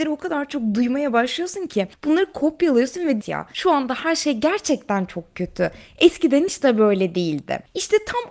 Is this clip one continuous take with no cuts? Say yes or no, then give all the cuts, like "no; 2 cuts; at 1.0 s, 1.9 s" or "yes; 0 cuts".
no; 1 cut; at 3.2 s